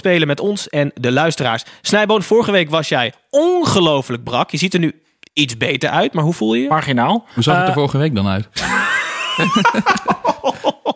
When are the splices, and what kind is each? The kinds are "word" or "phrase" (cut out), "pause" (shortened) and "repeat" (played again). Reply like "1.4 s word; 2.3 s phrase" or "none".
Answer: none